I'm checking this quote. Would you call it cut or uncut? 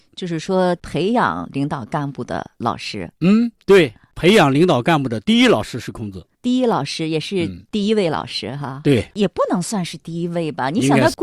cut